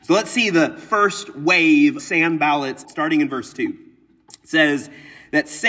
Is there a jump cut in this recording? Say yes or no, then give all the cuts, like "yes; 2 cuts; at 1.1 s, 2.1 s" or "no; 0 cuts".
yes; 2 cuts; at 2.0 s, 2.8 s